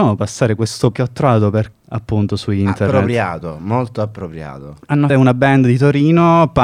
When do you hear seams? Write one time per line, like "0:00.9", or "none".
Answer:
0:00.9
0:01.7
0:05.1